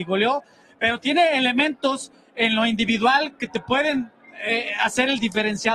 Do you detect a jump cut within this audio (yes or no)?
no